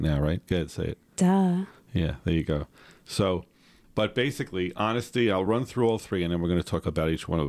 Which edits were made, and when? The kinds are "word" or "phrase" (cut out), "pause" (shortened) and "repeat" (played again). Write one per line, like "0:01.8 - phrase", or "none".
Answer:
none